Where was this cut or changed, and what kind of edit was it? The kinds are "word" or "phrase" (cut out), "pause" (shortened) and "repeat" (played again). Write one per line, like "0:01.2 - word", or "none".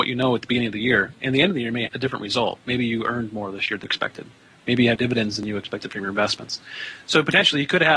0:01.9 - word
0:03.9 - word
0:05.0 - word

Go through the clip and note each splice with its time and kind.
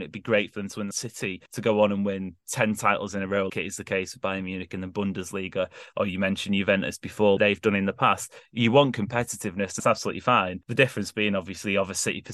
0:00.9 - phrase
0:01.5 - pause
0:03.5 - word
0:07.4 - word
0:09.8 - word
0:10.6 - pause

